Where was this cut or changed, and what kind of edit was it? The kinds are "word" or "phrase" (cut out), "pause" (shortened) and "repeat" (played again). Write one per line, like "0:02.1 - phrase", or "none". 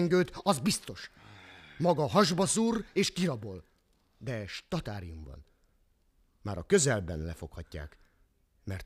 none